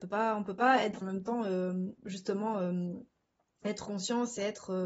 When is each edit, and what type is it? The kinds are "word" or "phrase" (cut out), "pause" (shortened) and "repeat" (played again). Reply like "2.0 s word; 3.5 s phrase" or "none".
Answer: 1.0 s phrase; 2.0 s pause; 3.8 s word